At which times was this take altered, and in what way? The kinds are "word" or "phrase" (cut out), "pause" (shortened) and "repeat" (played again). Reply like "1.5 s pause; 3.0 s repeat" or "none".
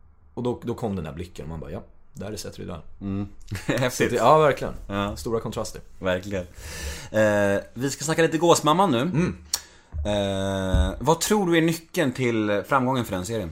none